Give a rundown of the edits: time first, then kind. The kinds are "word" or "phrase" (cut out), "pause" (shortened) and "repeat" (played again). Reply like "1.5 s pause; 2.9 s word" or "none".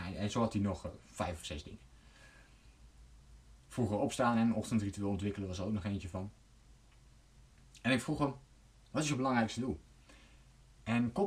none